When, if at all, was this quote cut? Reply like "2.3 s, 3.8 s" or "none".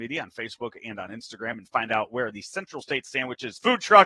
none